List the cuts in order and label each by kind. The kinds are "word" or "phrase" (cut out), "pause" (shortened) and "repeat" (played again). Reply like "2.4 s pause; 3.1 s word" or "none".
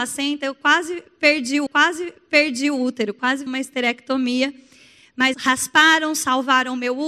1.7 s repeat; 3.5 s word; 5.3 s word